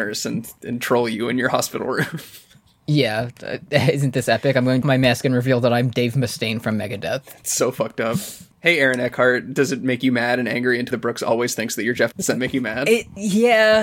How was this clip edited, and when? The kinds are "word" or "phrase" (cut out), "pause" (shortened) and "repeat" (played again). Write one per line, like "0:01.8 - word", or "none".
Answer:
0:04.8 - phrase
0:08.5 - pause
0:10.9 - word
0:12.1 - word